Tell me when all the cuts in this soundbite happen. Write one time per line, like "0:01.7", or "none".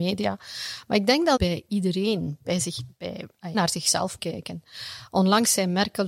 0:01.4
0:03.5
0:04.2